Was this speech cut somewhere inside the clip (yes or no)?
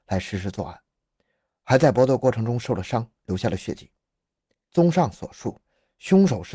no